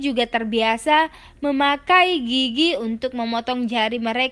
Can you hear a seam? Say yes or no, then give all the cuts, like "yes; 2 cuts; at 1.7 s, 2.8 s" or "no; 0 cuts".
no; 0 cuts